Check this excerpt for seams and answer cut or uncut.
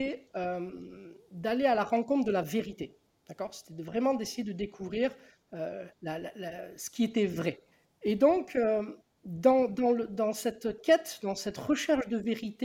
cut